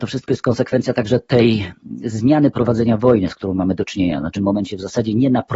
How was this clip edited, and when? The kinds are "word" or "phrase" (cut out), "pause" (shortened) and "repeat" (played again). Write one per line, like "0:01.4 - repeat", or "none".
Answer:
0:04.3 - phrase